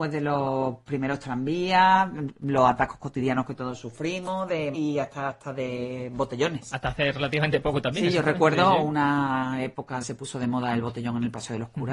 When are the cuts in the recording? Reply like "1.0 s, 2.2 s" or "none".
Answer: 4.7 s, 10.0 s